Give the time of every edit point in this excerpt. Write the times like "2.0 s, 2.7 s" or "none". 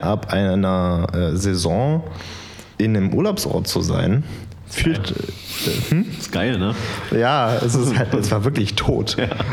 2.7 s, 4.9 s